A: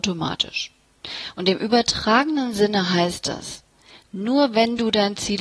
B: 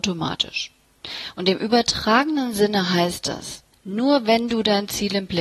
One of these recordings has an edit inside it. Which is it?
B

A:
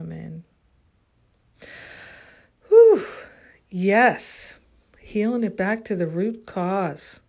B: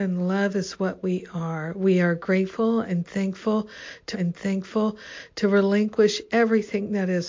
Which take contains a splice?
B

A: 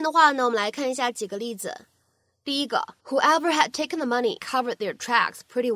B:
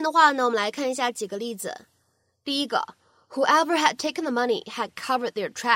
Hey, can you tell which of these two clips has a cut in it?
A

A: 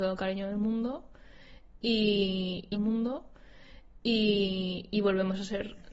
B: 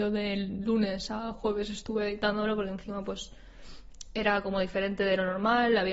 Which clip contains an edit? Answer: A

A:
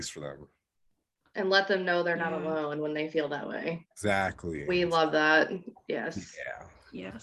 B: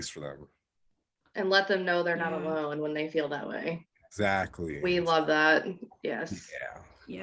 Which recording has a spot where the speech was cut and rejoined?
A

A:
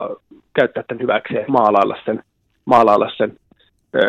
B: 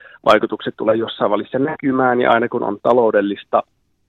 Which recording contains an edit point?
A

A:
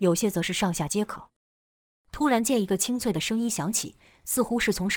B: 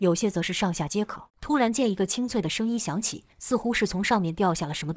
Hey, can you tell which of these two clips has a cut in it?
B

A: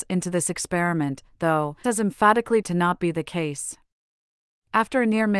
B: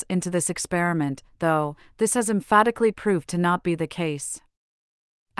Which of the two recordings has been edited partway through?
A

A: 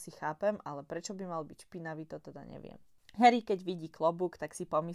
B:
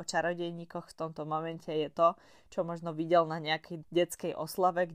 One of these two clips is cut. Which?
B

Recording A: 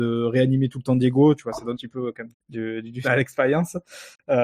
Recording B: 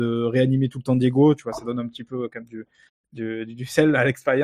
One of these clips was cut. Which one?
A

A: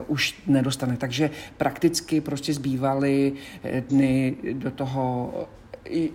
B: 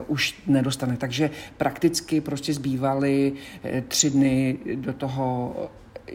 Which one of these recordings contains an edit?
A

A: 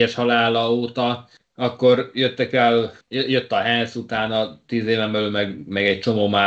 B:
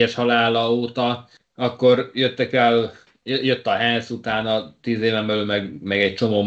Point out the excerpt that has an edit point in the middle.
A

